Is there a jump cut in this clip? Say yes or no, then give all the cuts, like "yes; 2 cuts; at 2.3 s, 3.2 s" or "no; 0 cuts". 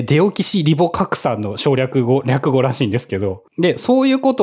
yes; 1 cut; at 3.5 s